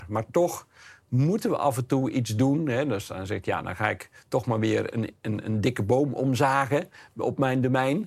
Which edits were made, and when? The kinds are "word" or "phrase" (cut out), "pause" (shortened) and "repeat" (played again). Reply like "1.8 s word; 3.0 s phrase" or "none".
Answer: none